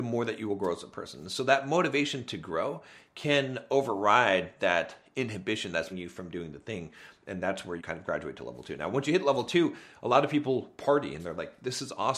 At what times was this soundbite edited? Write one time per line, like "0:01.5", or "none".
0:05.9
0:07.8